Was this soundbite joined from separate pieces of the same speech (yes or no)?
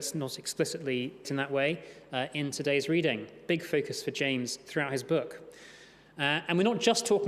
yes